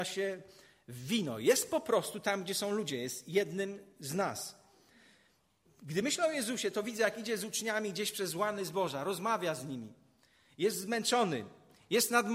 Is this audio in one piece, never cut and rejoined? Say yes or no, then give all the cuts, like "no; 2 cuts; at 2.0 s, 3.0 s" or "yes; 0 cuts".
yes; 0 cuts